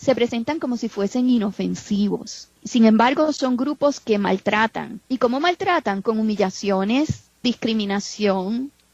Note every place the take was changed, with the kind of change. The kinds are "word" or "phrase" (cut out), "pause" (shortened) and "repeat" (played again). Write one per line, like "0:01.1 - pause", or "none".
0:02.6 - pause
0:05.0 - pause
0:07.4 - word